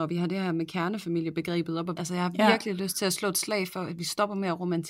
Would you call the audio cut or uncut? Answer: cut